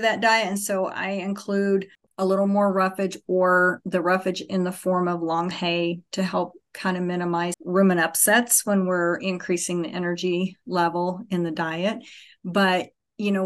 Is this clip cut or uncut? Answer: cut